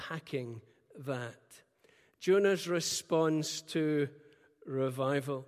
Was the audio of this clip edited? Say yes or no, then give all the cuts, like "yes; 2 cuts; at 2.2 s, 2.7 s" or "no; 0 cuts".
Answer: no; 0 cuts